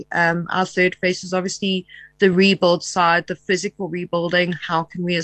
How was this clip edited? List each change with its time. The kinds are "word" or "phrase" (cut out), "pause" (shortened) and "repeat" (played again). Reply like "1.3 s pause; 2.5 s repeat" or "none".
none